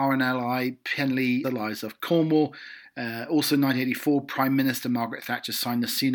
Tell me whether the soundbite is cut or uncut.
cut